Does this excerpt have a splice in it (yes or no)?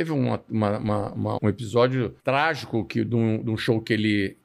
yes